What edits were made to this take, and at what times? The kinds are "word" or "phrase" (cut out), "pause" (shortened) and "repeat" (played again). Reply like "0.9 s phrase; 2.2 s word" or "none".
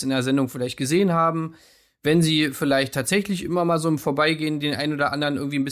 none